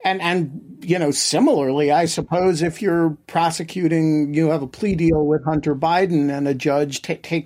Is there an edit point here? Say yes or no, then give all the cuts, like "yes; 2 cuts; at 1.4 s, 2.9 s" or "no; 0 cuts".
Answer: no; 0 cuts